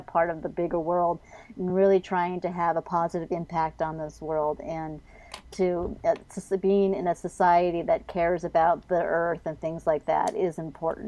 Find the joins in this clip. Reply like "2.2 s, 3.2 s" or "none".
none

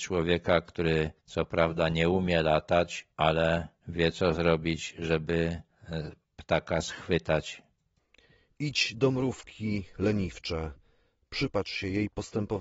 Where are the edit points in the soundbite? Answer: 3.1 s, 8.0 s

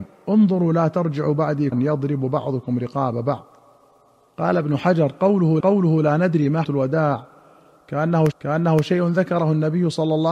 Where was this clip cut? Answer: 1.7 s, 5.6 s, 6.6 s, 8.3 s

